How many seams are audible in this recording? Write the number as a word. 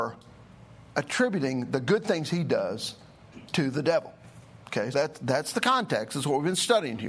one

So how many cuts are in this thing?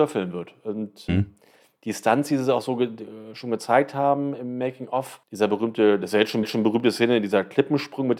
three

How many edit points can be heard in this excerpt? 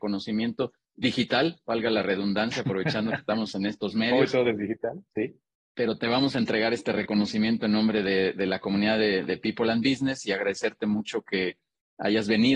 zero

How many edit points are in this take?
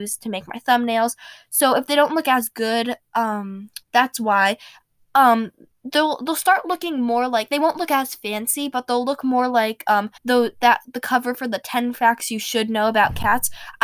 two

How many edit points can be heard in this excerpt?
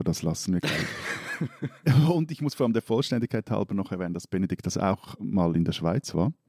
zero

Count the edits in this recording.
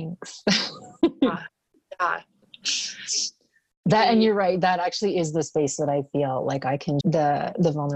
one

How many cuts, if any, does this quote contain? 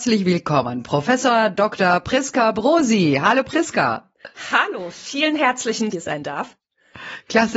one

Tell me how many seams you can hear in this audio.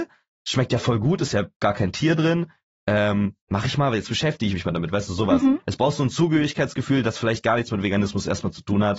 zero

